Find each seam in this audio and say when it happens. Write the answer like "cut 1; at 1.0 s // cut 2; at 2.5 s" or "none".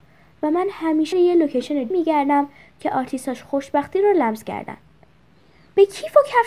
cut 1; at 1.1 s // cut 2; at 1.9 s